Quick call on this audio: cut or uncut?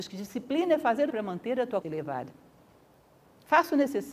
cut